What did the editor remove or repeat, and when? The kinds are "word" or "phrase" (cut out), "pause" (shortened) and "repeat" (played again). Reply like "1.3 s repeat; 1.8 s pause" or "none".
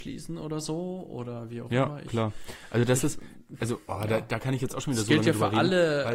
none